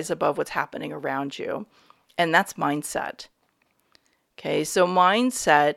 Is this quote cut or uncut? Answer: uncut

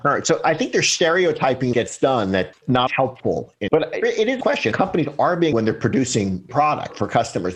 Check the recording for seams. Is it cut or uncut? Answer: cut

